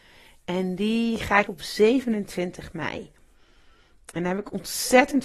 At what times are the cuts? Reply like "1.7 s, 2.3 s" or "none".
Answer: 1.5 s